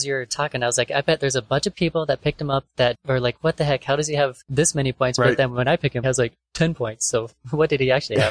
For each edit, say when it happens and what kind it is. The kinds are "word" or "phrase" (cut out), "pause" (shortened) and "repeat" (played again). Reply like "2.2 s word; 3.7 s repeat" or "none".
2.9 s word; 4.4 s pause; 6.0 s phrase